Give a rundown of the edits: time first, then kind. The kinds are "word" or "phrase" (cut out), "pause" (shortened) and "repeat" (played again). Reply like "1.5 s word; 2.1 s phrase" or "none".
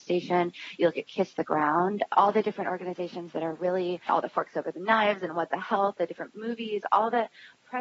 none

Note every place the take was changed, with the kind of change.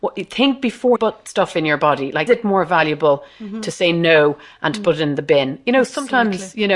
1.0 s word; 2.3 s word

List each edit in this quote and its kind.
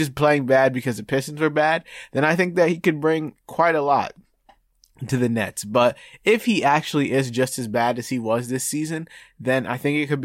none

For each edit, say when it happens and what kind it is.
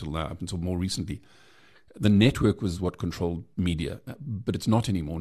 none

